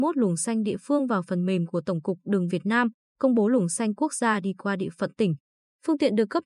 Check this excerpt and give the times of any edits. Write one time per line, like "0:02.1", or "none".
0:02.5